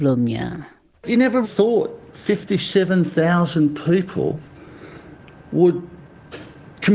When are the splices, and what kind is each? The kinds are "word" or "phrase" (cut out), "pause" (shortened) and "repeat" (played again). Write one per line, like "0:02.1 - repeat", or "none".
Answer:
0:01.4 - word